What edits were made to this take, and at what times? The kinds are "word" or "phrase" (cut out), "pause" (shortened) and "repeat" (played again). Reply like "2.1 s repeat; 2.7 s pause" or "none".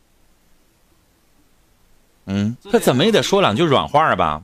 2.6 s pause